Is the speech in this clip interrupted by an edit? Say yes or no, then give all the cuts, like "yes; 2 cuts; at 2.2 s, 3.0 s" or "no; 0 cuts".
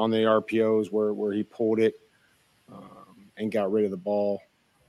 no; 0 cuts